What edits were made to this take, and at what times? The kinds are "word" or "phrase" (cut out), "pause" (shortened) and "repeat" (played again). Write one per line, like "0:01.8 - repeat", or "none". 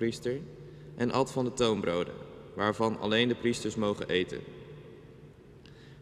none

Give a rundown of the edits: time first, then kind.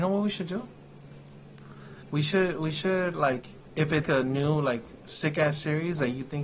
0:02.0 - pause
0:04.0 - word

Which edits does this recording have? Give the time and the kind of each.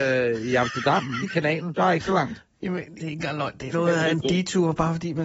0:01.2 - word
0:01.7 - word
0:03.0 - word
0:03.7 - word

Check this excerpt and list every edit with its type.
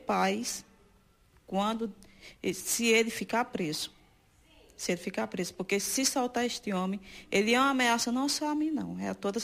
none

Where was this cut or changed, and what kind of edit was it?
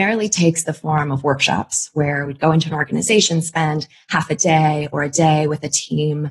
none

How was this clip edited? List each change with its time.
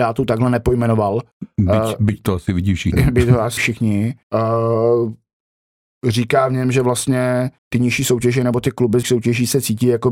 0:01.3 - pause
0:03.6 - word
0:04.2 - pause
0:07.6 - pause
0:09.0 - word

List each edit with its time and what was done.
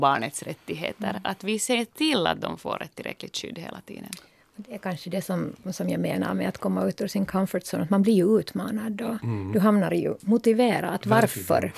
none

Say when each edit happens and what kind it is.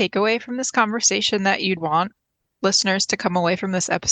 0:01.8 - word

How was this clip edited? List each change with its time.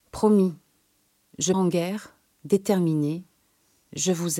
0:01.5 - word

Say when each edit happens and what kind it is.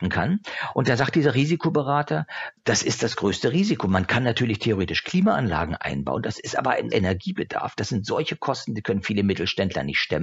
0:06.9 - word

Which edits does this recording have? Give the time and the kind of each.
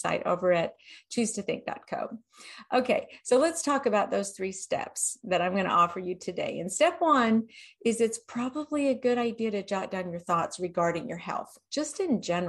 none

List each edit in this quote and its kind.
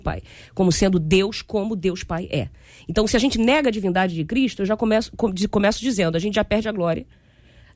none

